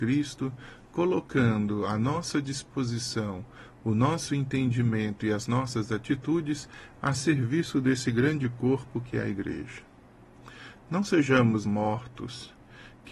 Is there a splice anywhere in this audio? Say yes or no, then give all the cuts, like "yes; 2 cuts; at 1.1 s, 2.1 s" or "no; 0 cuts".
yes; 1 cut; at 11.6 s